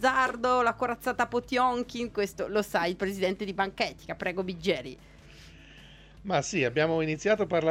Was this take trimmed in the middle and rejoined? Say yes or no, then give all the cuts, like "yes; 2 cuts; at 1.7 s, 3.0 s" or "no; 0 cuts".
no; 0 cuts